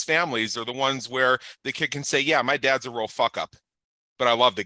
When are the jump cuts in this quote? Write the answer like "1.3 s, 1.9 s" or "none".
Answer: none